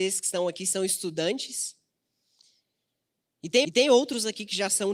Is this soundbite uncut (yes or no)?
no